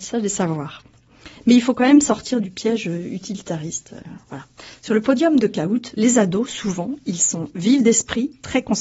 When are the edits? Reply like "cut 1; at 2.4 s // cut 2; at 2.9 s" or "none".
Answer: cut 1; at 5.9 s